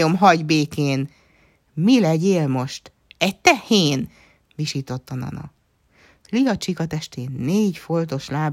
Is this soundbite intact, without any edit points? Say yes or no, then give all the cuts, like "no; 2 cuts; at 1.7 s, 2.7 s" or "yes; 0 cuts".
yes; 0 cuts